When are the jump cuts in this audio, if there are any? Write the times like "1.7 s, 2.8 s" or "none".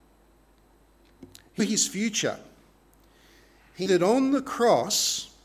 1.6 s, 3.9 s